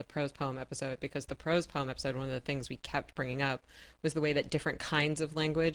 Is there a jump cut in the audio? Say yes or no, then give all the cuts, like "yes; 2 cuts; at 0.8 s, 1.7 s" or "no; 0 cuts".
no; 0 cuts